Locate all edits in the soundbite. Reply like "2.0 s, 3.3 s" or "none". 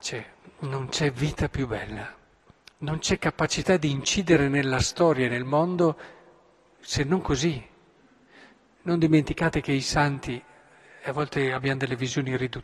none